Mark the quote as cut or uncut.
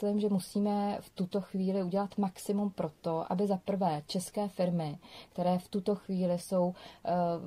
uncut